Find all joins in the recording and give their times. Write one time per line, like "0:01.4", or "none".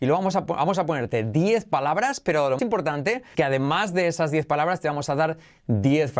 0:02.6
0:03.3